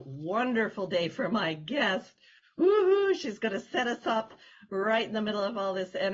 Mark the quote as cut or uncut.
uncut